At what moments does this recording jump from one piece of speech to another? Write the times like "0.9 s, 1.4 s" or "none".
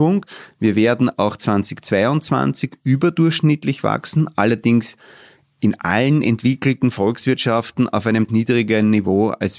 8.3 s